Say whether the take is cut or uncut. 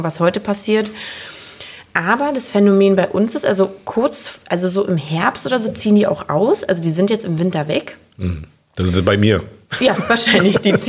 uncut